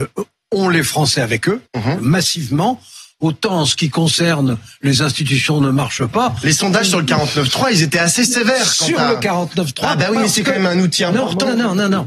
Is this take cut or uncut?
cut